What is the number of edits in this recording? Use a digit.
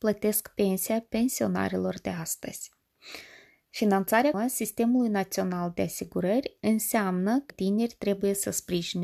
2